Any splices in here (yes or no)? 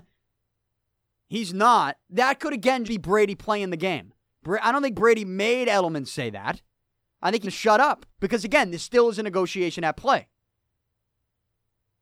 yes